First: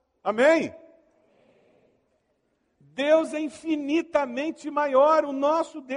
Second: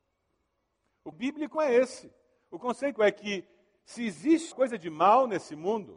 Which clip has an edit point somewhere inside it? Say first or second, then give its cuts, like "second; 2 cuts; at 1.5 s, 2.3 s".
second; 4 cuts; at 1.1 s, 1.5 s, 3.0 s, 4.5 s